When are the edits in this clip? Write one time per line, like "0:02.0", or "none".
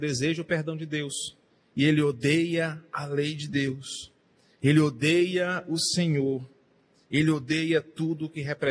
0:01.5